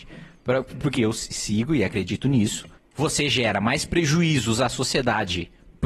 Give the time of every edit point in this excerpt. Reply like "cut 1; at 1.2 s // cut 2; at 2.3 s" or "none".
cut 1; at 1.0 s // cut 2; at 2.8 s